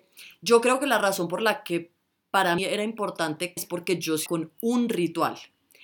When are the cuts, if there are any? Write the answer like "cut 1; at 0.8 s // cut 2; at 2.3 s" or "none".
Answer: cut 1; at 2.6 s // cut 2; at 3.6 s // cut 3; at 4.3 s